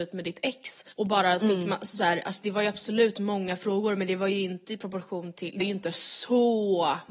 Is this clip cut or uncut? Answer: cut